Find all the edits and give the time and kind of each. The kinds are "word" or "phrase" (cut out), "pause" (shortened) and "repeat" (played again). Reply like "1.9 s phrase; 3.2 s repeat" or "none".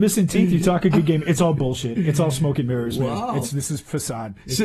none

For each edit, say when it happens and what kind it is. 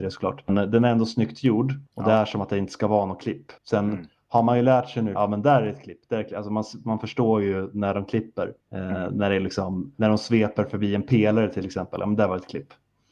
1.9 s pause; 3.6 s pause; 5.1 s phrase; 8.6 s pause

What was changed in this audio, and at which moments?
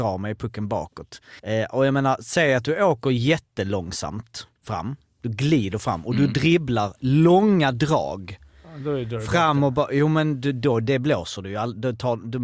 1.4 s pause; 4.6 s pause

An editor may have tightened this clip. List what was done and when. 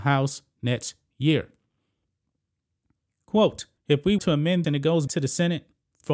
3.8 s pause; 4.2 s word; 4.6 s word; 5.1 s word

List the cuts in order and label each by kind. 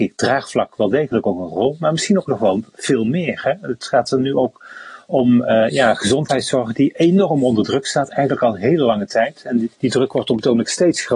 9.7 s pause

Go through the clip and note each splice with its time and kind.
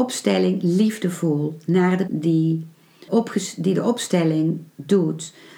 2.1 s word; 3.1 s word

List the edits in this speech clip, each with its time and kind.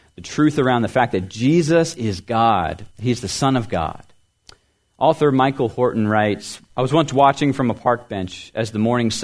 2.9 s pause; 4.4 s pause; 6.7 s pause

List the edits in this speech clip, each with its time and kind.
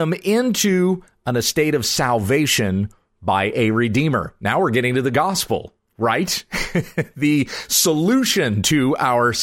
none

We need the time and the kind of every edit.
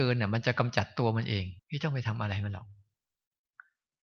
1.6 s pause

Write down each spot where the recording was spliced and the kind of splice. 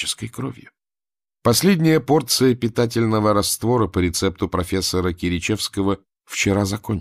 none

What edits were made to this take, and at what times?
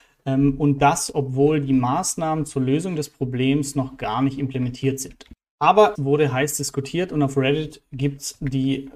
5.9 s word

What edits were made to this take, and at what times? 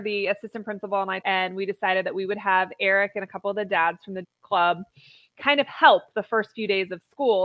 1.2 s word; 4.2 s word

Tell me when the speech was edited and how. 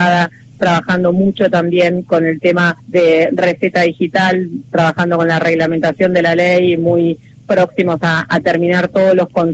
2.8 s pause

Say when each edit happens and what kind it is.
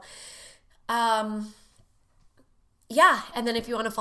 none

